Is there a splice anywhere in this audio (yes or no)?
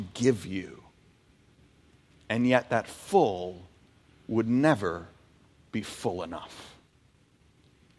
no